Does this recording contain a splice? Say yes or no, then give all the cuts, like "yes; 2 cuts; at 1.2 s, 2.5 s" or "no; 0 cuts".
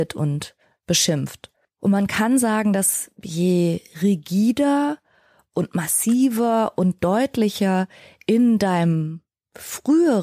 no; 0 cuts